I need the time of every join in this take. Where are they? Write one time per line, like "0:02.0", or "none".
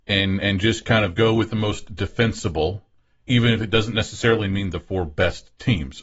none